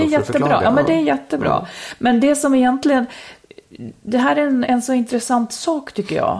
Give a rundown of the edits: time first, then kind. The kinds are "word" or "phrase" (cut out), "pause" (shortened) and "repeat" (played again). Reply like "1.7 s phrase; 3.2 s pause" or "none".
4.6 s word